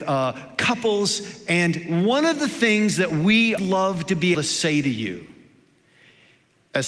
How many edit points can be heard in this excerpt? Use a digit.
2